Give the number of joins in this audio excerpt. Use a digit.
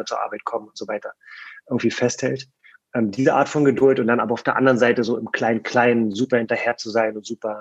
0